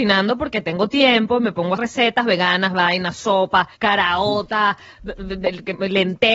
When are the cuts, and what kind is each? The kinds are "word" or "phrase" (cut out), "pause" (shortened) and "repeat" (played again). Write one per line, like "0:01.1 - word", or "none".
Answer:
0:01.8 - word
0:03.7 - pause